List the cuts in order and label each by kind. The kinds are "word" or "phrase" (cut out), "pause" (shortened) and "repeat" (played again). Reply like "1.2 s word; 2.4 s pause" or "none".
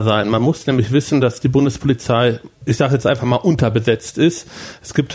none